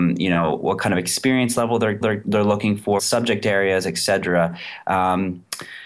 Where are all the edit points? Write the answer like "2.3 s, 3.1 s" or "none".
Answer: 2.0 s, 3.0 s